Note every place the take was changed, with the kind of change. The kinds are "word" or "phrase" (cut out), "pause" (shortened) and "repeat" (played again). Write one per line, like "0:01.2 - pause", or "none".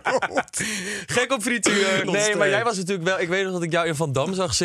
0:02.0 - word